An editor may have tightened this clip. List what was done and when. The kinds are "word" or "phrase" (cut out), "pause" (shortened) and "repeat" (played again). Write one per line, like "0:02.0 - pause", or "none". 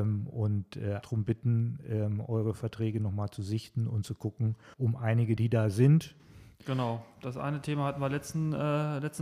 0:01.0 - word
0:04.7 - pause
0:05.4 - phrase